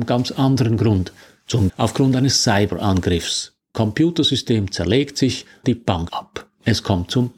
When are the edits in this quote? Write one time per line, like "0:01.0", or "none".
0:01.7
0:03.7
0:05.6
0:06.1